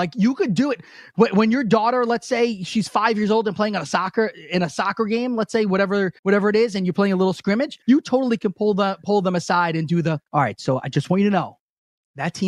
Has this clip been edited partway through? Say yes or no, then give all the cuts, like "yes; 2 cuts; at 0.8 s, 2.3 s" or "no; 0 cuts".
yes; 3 cuts; at 6.2 s, 7.8 s, 10.3 s